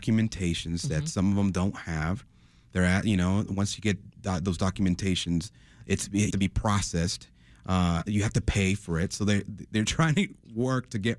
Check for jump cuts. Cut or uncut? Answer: cut